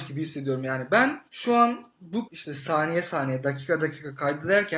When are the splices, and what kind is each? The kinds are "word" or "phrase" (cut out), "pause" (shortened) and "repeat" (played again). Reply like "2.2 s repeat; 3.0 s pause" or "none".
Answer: 1.3 s pause; 2.3 s word